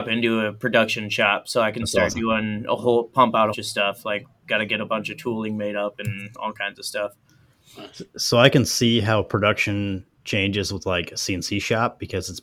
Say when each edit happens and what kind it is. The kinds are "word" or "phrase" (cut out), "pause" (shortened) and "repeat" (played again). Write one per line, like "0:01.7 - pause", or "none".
0:03.5 - phrase